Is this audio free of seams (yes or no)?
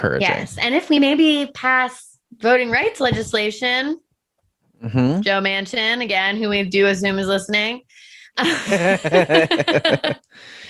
yes